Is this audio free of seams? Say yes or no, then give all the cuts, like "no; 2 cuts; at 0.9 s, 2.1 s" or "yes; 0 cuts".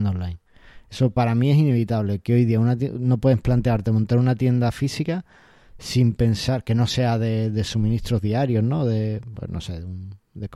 yes; 0 cuts